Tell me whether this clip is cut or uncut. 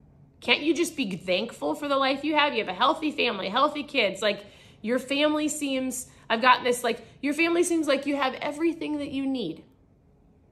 uncut